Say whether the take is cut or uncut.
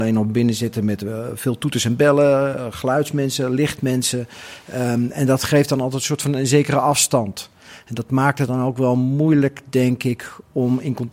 uncut